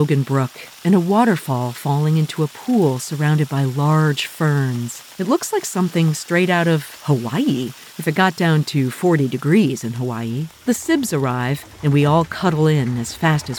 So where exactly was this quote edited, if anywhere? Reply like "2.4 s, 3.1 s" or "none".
5.1 s, 7.9 s, 10.6 s, 11.7 s